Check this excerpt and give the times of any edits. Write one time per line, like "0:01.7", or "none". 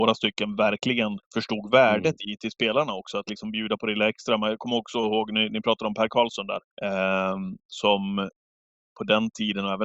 0:01.2
0:06.7